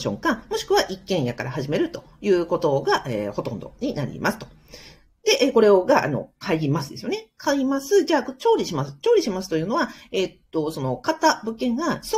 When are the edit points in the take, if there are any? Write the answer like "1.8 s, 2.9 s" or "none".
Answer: none

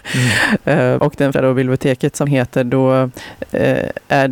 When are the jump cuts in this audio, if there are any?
1.0 s, 1.3 s, 2.2 s

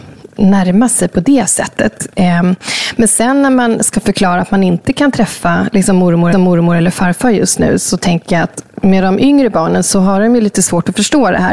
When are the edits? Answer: 6.3 s

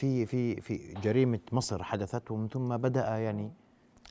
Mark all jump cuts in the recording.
none

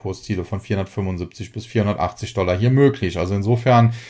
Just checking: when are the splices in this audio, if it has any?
none

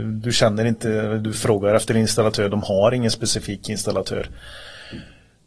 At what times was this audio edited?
none

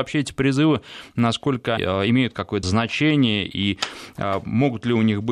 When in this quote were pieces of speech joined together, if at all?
1.8 s, 2.6 s

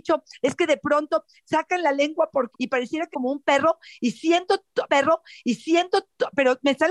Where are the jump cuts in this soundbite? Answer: 2.5 s, 3.1 s, 4.9 s

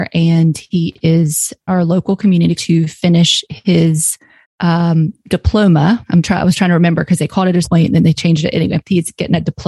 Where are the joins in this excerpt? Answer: 1.7 s, 2.6 s, 4.4 s, 7.6 s

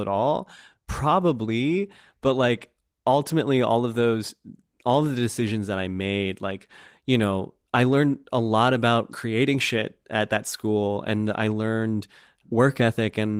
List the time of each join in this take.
none

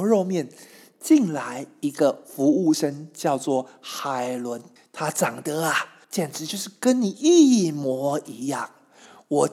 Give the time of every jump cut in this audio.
4.8 s, 6.0 s

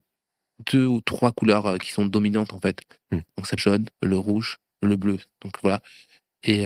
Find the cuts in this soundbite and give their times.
3.6 s, 3.9 s

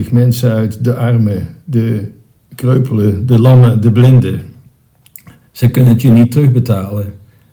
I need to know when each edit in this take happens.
none

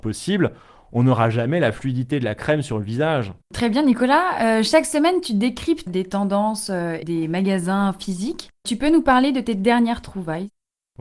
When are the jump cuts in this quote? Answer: 3.4 s, 5.9 s, 7.0 s, 8.6 s

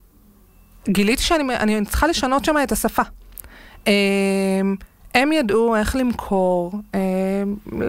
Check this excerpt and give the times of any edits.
none

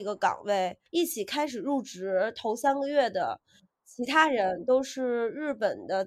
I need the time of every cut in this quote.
none

